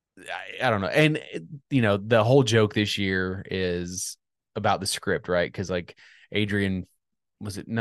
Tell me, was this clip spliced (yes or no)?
no